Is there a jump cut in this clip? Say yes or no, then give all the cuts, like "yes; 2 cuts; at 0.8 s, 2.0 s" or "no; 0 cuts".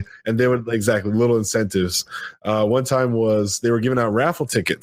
no; 0 cuts